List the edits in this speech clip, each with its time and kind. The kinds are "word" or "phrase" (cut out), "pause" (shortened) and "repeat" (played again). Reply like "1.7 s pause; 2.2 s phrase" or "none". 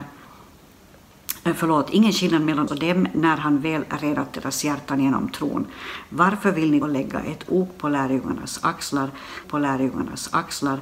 2.7 s word; 6.8 s phrase; 9.4 s repeat